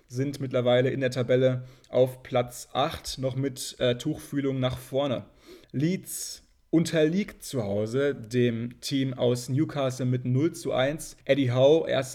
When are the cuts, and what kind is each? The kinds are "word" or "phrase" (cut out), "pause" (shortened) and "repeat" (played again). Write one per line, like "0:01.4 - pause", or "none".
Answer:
0:05.6 - pause
0:11.2 - pause